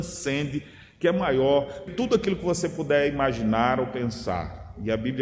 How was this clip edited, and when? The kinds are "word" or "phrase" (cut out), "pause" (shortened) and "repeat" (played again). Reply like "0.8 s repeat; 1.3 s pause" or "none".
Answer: 1.9 s word